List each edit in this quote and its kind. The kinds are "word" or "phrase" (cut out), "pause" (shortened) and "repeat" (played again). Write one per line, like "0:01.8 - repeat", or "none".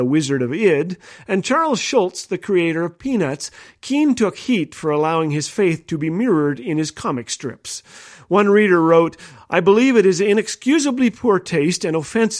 none